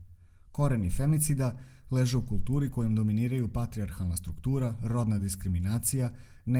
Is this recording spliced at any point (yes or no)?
no